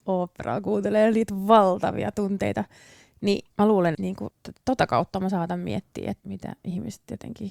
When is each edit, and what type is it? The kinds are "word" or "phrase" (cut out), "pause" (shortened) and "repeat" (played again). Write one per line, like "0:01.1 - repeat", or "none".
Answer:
0:03.5 - pause
0:03.9 - word
0:04.3 - word
0:06.2 - word